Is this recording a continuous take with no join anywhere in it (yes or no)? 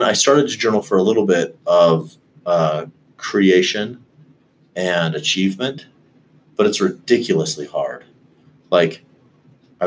yes